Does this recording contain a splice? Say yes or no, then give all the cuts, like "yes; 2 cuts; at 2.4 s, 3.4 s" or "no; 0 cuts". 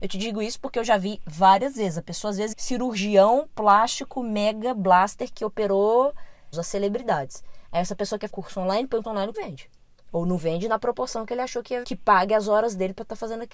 yes; 7 cuts; at 2.5 s, 6.5 s, 8.3 s, 9.0 s, 9.3 s, 9.8 s, 11.8 s